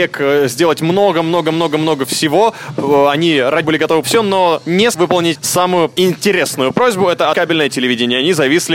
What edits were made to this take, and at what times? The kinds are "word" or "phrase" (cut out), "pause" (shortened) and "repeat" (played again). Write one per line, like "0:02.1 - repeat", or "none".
0:03.6 - word
0:04.0 - phrase
0:04.9 - word
0:05.3 - word
0:07.3 - word